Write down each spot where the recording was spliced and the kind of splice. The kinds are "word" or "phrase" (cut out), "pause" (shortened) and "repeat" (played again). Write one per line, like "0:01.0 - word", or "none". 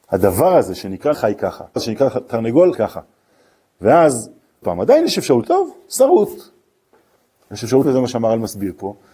0:01.1 - word
0:01.8 - word
0:02.7 - word
0:04.6 - word
0:05.4 - word
0:07.8 - word